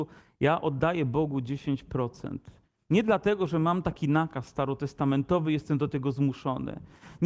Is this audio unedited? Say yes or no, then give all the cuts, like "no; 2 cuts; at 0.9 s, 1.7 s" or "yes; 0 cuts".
yes; 0 cuts